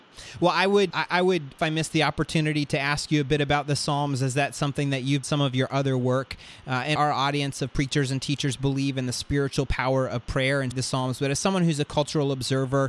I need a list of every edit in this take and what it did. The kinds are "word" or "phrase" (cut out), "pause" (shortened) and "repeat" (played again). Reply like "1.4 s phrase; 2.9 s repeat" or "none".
0.9 s word; 1.6 s phrase; 5.2 s phrase; 7.0 s word; 10.7 s phrase